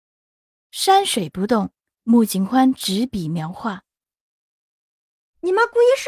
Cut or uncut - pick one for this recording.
uncut